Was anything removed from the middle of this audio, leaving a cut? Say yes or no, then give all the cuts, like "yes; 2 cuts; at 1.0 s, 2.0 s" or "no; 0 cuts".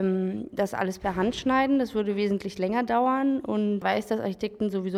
yes; 1 cut; at 3.8 s